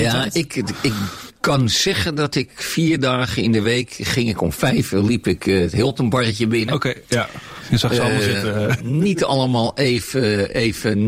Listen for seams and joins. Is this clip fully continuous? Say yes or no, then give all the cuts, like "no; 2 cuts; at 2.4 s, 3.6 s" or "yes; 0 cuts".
yes; 0 cuts